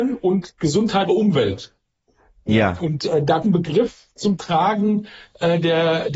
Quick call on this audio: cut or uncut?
cut